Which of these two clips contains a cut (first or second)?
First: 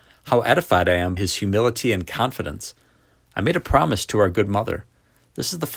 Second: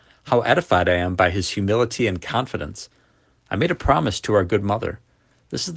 first